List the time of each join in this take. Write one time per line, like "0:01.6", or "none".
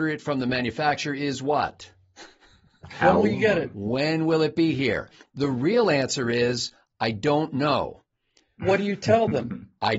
none